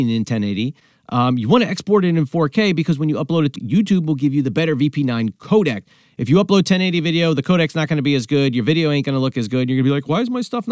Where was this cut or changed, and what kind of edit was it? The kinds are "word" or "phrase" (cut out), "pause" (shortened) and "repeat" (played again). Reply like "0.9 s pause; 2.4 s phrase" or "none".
3.5 s word